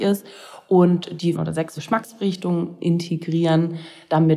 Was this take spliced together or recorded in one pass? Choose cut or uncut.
cut